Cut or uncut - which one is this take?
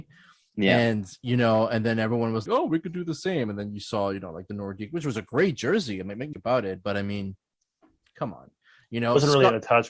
cut